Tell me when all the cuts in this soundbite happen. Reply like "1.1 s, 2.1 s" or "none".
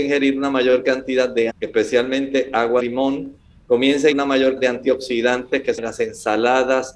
1.5 s, 2.8 s, 4.1 s, 4.6 s, 5.8 s